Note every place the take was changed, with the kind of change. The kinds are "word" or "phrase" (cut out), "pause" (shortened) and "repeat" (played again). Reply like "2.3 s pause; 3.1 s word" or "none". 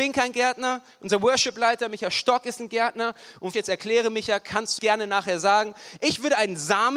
3.5 s phrase; 4.8 s phrase